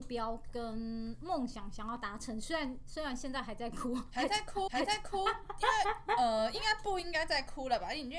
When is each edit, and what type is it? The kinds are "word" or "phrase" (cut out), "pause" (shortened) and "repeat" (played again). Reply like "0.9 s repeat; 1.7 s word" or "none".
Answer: 4.7 s repeat